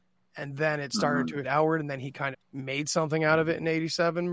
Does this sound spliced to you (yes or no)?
yes